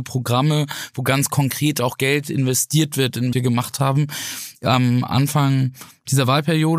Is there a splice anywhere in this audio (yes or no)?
yes